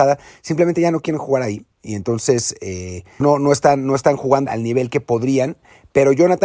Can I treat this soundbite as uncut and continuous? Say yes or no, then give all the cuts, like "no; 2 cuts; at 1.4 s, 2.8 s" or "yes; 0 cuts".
no; 3 cuts; at 1.7 s, 3.2 s, 4.5 s